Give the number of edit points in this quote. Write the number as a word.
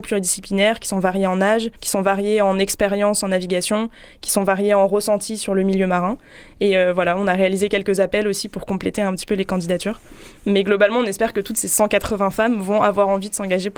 one